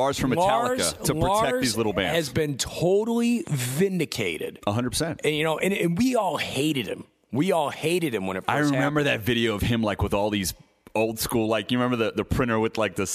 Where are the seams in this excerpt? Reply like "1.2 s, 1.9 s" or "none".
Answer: none